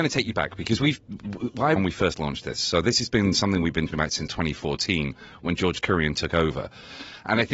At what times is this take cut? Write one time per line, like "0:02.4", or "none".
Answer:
0:01.8
0:03.9
0:04.3